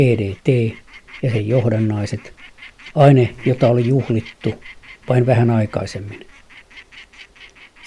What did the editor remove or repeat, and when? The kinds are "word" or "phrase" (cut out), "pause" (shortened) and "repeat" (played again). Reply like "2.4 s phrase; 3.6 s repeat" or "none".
5.0 s pause

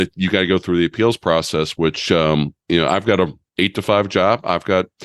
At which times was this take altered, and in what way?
2.6 s pause

